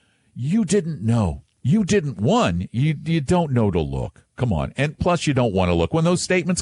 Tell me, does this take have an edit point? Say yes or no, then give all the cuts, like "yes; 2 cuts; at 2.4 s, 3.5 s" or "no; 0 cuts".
no; 0 cuts